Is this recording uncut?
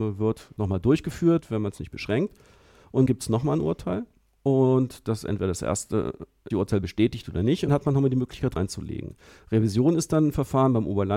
no; 4 cuts; at 3.1 s, 6.5 s, 7.7 s, 8.6 s

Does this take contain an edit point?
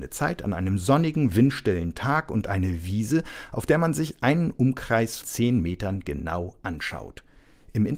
yes; 1 cut; at 5.2 s

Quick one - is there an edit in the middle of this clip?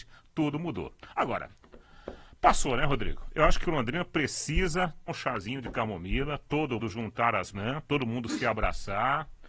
yes; 3 cuts; at 5.1 s, 6.8 s, 7.5 s

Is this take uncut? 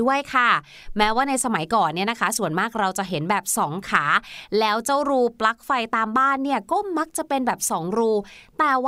yes; 0 cuts

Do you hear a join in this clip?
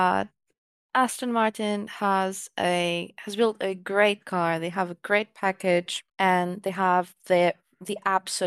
yes; 1 cut; at 6.1 s

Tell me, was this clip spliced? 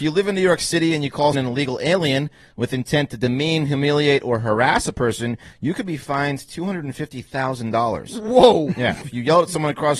yes; 2 cuts; at 1.3 s, 9.0 s

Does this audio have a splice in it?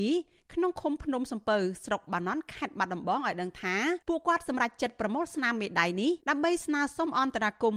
yes; 2 cuts; at 4.0 s, 6.2 s

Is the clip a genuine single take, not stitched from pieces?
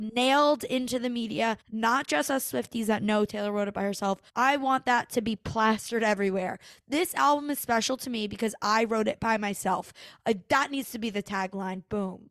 no; 2 cuts; at 1.6 s, 4.3 s

